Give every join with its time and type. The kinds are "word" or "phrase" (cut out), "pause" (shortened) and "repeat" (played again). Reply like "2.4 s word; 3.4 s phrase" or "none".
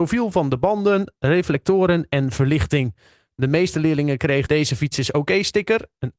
4.5 s word